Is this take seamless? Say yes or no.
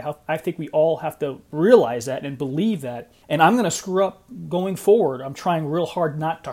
no